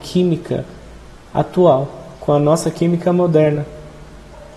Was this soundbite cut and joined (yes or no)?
yes